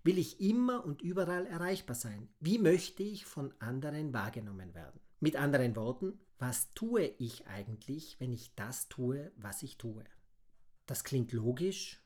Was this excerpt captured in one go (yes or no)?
no